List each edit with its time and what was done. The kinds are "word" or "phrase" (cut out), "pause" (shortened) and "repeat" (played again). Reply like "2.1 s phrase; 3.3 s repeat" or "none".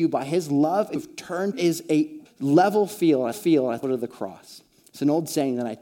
1.0 s word; 1.5 s phrase; 2.3 s word; 3.3 s repeat; 3.8 s word